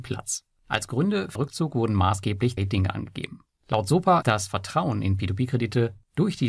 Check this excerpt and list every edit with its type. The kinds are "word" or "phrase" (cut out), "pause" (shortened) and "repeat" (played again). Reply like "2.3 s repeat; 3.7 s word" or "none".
1.4 s word; 2.6 s word; 4.2 s word